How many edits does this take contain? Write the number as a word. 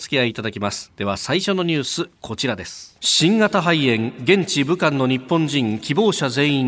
one